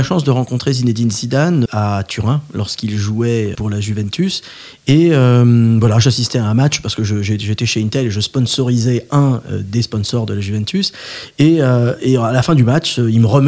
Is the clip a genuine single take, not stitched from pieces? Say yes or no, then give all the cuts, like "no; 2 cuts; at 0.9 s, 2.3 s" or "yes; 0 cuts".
no; 2 cuts; at 1.7 s, 3.5 s